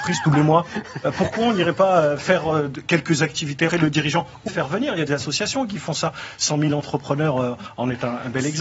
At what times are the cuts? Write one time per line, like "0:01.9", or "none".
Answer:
0:03.7
0:04.5
0:05.1